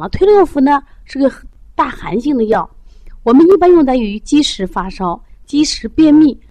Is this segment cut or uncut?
uncut